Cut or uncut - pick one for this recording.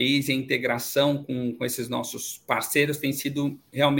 uncut